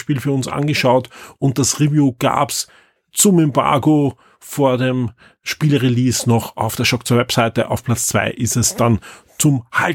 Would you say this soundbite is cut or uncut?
uncut